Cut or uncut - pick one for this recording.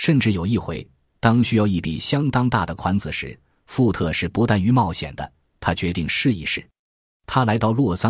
uncut